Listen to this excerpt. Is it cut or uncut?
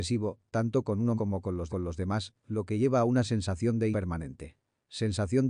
cut